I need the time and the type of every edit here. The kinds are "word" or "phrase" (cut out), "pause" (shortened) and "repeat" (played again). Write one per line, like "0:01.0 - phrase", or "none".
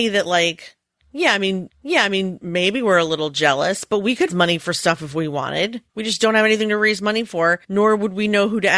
0:01.7 - repeat
0:04.3 - word
0:05.9 - pause
0:07.6 - pause